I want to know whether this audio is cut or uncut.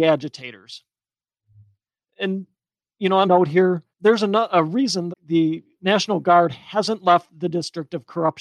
cut